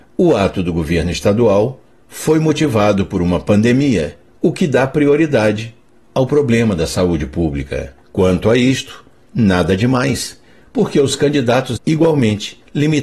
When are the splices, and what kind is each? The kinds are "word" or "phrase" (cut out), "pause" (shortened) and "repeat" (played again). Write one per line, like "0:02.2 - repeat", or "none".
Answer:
0:04.3 - pause
0:08.0 - pause
0:11.8 - word